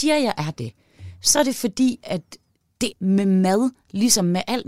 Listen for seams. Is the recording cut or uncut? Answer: cut